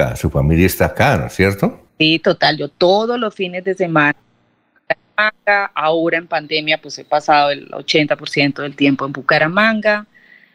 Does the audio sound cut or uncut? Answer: cut